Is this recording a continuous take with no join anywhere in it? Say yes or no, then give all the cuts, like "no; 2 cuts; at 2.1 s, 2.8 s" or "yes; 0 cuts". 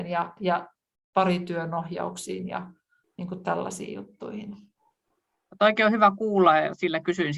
yes; 0 cuts